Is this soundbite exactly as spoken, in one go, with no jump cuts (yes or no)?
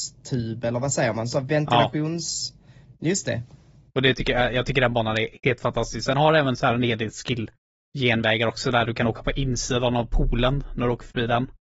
yes